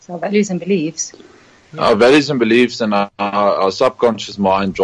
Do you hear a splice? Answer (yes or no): no